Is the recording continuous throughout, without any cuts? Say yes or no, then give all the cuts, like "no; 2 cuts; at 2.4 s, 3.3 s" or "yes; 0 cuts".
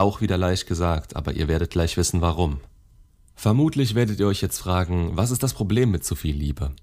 yes; 0 cuts